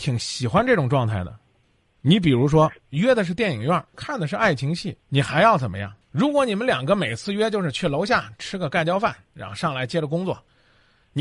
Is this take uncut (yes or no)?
no